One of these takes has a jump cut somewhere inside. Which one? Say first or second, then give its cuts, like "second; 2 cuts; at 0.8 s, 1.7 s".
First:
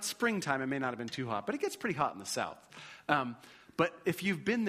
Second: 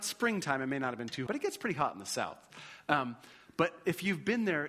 second; 1 cut; at 1.3 s